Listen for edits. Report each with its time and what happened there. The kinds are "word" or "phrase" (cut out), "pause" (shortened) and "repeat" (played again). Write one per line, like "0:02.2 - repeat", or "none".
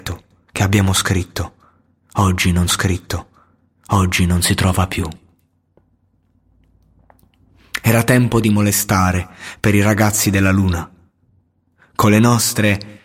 0:02.7 - repeat